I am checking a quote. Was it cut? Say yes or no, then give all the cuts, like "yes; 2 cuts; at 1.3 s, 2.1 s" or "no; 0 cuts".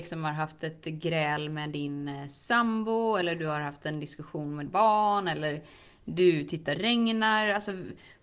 yes; 2 cuts; at 4.7 s, 6.7 s